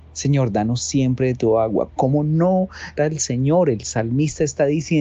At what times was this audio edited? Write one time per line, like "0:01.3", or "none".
0:03.0

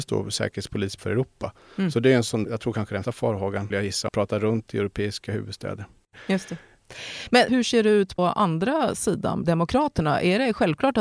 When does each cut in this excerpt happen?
0:01.0
0:02.4
0:03.0
0:03.7
0:04.1
0:07.5
0:08.2
0:09.4

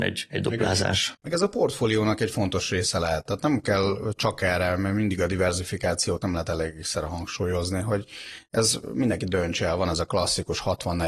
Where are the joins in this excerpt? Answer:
0:06.2

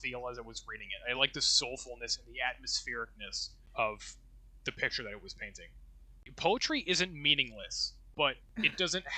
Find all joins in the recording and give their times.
none

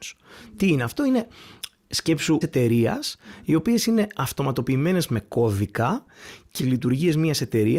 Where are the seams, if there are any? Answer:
0:02.4
0:06.6

